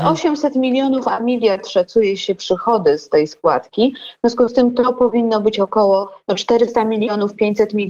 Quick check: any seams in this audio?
no; 0 cuts

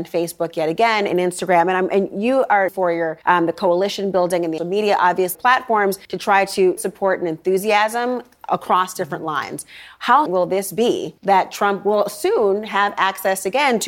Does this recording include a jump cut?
yes; 8 cuts; at 2.7 s, 3.2 s, 4.6 s, 5.3 s, 6.0 s, 6.8 s, 10.3 s, 11.2 s

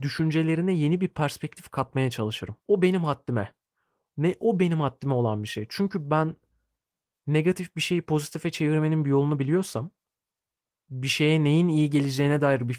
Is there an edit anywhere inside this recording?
yes; 1 cut; at 2.6 s

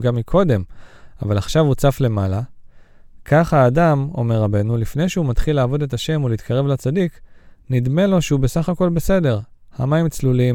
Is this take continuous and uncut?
yes; 0 cuts

